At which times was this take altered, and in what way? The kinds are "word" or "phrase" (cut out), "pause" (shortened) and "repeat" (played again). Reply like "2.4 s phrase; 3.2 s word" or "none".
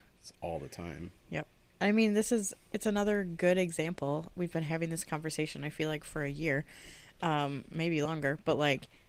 none